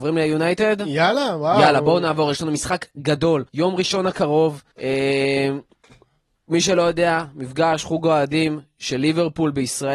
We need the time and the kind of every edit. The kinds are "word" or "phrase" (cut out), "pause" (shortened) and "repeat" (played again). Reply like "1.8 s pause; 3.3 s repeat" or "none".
3.5 s pause; 4.7 s pause